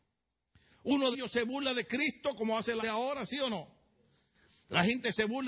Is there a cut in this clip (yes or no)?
yes